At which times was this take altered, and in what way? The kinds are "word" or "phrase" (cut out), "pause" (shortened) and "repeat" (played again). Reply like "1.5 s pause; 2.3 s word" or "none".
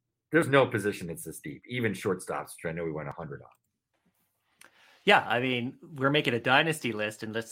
none

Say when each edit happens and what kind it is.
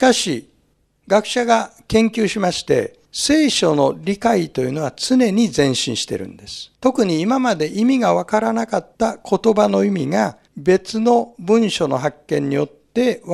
3.0 s pause; 6.7 s pause; 8.9 s pause; 10.5 s pause

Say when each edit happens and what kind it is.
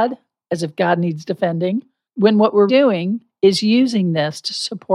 2.7 s word

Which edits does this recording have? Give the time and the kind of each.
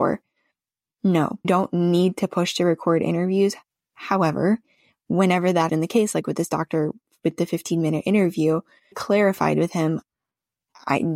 1.4 s word; 5.7 s word; 8.9 s word

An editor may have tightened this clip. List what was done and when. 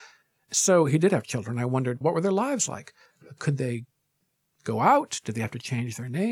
2.0 s word

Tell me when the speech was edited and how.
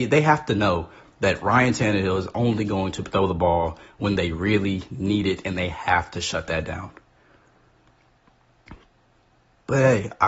none

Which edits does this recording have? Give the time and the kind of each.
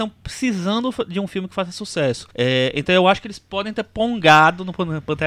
2.3 s pause

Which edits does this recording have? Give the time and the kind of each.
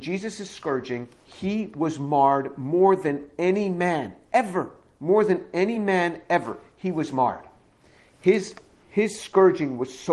none

